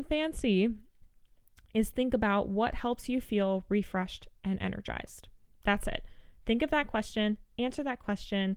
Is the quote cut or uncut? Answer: uncut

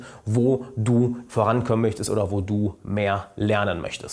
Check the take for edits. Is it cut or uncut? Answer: cut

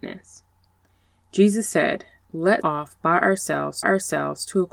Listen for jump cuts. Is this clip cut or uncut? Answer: cut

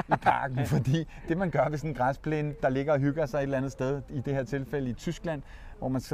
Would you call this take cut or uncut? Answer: uncut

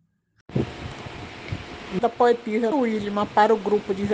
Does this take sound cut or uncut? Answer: cut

